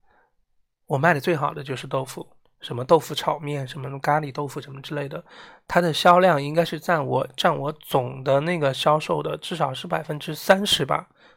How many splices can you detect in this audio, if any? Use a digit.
1